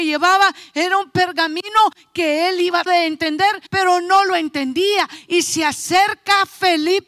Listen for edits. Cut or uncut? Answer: cut